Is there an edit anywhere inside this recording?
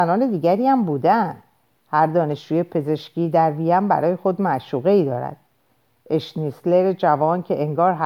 no; 0 cuts

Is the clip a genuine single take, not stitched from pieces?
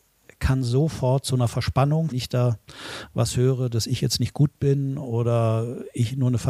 no; 1 cut; at 2.1 s

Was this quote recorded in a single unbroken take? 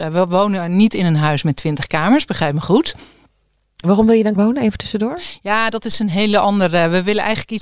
no; 1 cut; at 4.4 s

